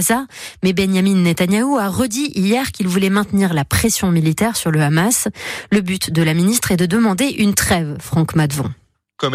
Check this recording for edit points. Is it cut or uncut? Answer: uncut